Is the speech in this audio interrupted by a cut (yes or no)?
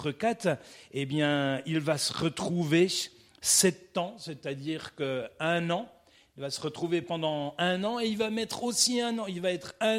no